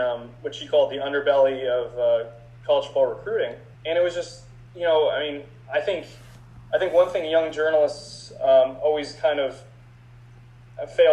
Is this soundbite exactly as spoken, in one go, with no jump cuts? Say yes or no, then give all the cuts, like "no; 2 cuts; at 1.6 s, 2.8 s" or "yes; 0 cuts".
no; 2 cuts; at 3.7 s, 4.7 s